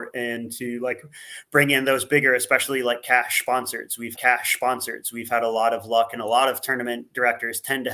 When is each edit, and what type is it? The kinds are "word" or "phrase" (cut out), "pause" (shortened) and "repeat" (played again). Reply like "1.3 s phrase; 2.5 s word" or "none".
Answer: 4.1 s repeat